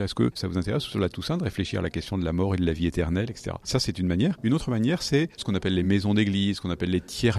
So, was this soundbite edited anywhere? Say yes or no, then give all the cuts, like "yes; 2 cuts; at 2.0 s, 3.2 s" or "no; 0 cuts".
no; 0 cuts